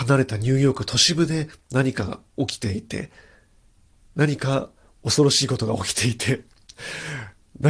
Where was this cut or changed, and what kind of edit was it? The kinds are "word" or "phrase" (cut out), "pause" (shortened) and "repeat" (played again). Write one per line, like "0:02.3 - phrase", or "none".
none